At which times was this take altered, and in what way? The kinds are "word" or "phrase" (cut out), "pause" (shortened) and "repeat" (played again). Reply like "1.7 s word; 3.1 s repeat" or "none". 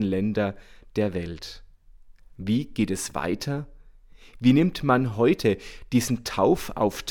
none